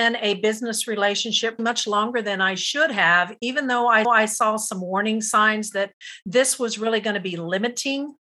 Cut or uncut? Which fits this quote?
cut